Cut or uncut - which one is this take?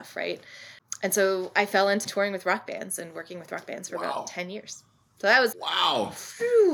cut